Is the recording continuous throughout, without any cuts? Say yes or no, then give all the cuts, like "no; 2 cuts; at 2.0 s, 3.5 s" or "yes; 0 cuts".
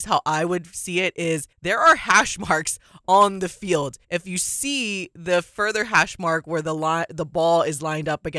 no; 2 cuts; at 1.5 s, 4.0 s